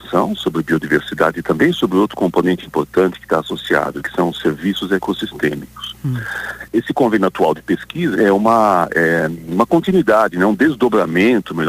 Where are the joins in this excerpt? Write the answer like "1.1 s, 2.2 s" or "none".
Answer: 8.1 s